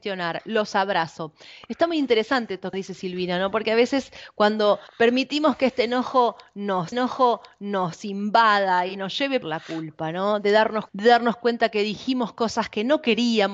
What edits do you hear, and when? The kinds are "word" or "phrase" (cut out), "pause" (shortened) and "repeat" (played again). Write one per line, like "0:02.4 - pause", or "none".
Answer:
0:02.7 - word
0:04.9 - pause
0:06.9 - repeat
0:09.4 - phrase
0:10.9 - phrase